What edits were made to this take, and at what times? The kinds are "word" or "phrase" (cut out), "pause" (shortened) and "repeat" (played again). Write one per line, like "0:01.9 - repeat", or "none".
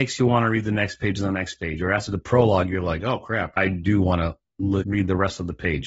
none